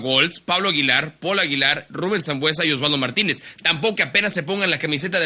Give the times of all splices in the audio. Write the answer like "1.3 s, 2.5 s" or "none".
4.0 s